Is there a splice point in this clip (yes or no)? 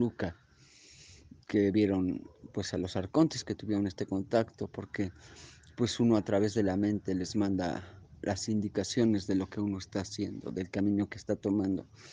no